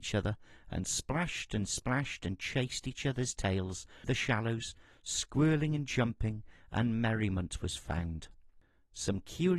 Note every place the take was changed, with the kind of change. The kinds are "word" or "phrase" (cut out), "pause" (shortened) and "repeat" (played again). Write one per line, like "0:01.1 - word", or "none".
0:04.0 - word